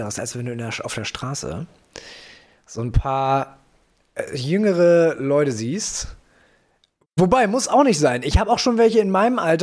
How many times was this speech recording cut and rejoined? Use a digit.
0